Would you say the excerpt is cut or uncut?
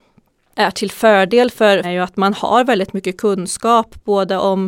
cut